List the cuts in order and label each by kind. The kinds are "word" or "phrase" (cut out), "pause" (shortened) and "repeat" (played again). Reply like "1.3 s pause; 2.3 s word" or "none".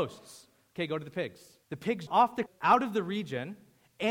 1.6 s pause; 2.1 s word; 2.5 s word